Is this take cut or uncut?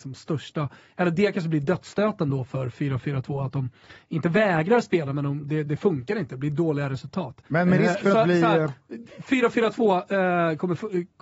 cut